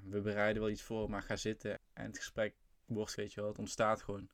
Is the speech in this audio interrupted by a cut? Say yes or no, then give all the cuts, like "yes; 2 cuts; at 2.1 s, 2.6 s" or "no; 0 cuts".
yes; 2 cuts; at 1.8 s, 3.2 s